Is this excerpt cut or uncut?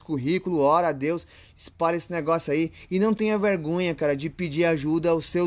uncut